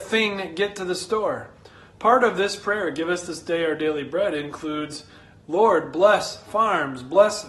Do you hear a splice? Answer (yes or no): no